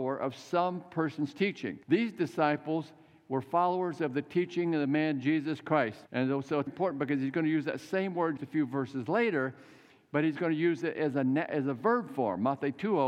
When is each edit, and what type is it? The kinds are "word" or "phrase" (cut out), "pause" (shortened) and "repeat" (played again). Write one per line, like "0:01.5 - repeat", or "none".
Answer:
0:01.8 - pause
0:06.1 - pause
0:06.7 - word
0:08.4 - word